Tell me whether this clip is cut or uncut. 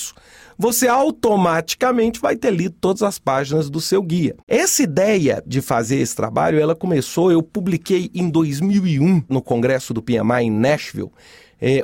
cut